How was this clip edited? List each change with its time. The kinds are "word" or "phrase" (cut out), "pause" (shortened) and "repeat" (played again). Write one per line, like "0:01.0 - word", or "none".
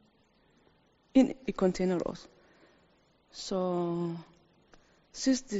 none